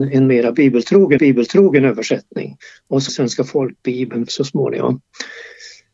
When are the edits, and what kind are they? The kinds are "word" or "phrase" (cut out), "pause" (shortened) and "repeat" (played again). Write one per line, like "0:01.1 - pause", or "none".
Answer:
0:01.2 - repeat
0:03.1 - word
0:04.3 - word